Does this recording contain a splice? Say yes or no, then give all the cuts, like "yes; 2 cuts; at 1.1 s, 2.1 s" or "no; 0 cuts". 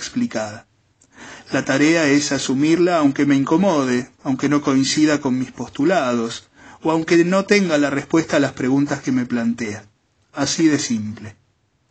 no; 0 cuts